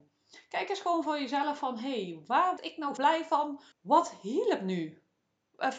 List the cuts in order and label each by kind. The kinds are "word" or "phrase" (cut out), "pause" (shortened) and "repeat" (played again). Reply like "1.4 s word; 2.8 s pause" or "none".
2.6 s phrase; 3.0 s word; 3.7 s pause